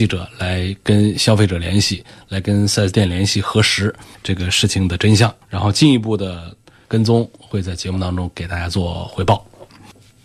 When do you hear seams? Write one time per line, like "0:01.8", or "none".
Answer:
0:05.4